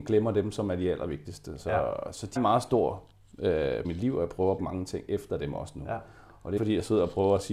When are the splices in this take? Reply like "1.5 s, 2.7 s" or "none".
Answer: 2.4 s, 3.8 s, 4.6 s, 6.6 s